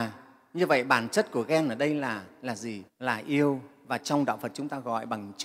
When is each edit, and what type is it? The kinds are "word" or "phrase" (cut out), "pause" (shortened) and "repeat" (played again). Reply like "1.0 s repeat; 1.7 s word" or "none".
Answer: 2.9 s pause